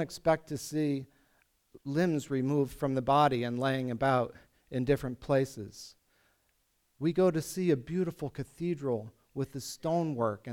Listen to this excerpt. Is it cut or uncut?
uncut